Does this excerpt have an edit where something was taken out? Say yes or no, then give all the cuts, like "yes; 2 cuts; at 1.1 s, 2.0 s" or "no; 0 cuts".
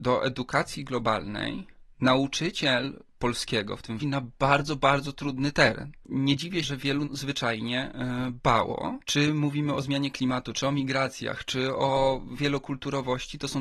yes; 5 cuts; at 1.9 s, 4.0 s, 6.6 s, 7.0 s, 9.0 s